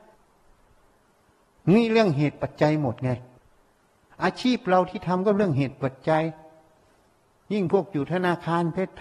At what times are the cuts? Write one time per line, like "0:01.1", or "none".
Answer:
none